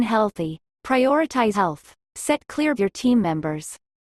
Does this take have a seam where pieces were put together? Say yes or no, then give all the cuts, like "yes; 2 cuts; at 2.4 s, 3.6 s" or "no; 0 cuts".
yes; 2 cuts; at 1.5 s, 2.8 s